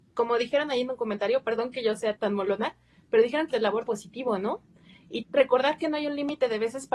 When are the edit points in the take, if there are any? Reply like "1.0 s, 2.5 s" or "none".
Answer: 2.2 s, 3.5 s, 3.9 s, 5.2 s

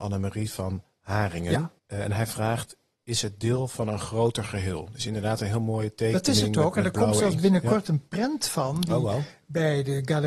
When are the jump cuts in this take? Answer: 1.8 s

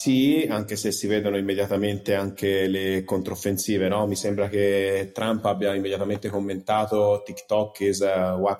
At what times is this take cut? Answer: none

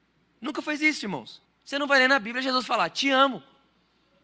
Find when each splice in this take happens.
1.4 s

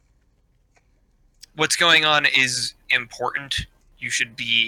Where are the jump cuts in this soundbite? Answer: none

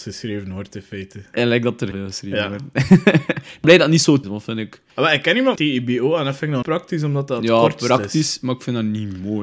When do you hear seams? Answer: 1.9 s, 3.6 s, 4.2 s, 4.9 s, 5.6 s, 6.6 s

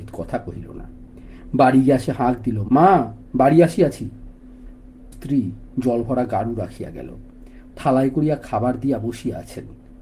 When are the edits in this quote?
2.7 s, 5.1 s, 7.7 s

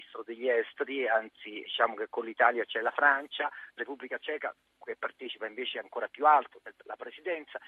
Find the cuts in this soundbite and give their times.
1.6 s, 3.8 s, 5.8 s

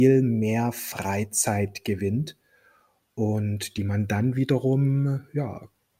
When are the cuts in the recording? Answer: none

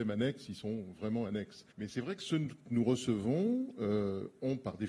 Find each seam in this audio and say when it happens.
1.7 s

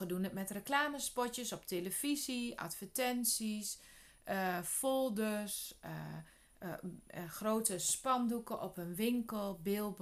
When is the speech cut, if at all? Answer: none

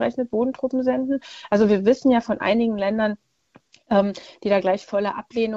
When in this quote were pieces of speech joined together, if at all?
none

